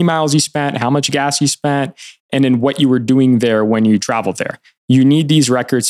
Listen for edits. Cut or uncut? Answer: uncut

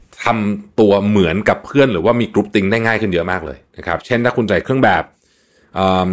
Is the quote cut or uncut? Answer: cut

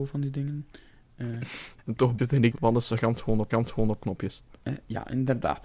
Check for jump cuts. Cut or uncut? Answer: cut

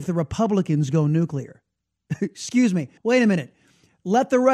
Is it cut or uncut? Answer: cut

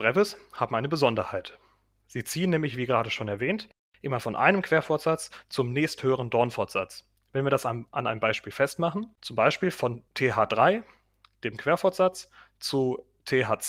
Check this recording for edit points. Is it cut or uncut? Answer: cut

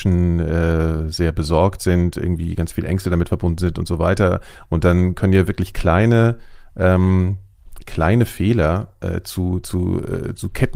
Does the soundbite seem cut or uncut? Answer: uncut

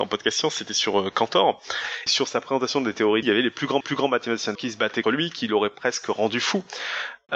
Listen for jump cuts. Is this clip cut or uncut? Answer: cut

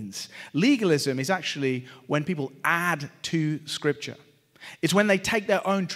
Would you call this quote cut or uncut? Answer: uncut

